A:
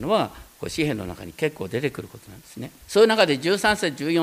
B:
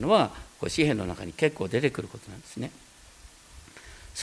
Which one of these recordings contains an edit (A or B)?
A